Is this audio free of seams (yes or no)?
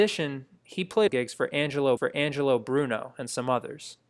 no